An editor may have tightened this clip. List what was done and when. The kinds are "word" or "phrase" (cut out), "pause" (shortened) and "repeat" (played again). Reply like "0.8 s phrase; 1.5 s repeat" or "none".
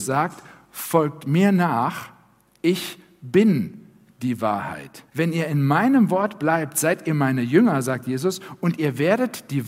5.1 s pause